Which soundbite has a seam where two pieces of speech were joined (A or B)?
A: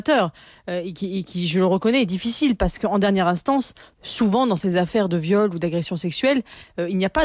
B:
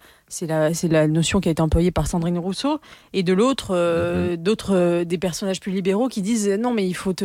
A